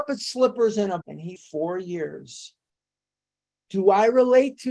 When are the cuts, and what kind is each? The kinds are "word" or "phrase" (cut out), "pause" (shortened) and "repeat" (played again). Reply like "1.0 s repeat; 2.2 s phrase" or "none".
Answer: 1.0 s word; 1.4 s phrase

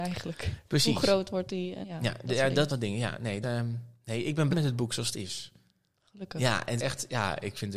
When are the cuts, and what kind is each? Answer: 1.8 s word; 2.7 s word; 3.4 s word; 4.5 s word; 6.8 s word

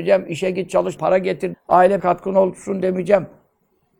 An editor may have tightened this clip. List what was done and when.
1.0 s word; 1.5 s word; 2.0 s word

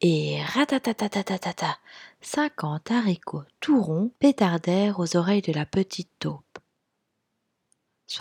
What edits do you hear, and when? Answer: 4.2 s pause

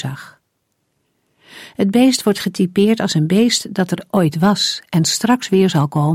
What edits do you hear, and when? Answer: none

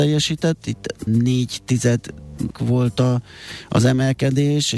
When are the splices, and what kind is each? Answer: 1.1 s word; 2.5 s word

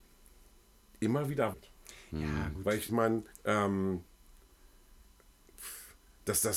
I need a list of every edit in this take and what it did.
1.5 s phrase; 2.9 s phrase; 3.3 s pause

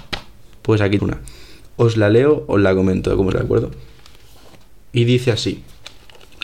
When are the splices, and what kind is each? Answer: 1.0 s word; 3.3 s word

